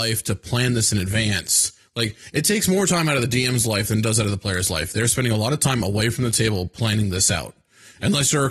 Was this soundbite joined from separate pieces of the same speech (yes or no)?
no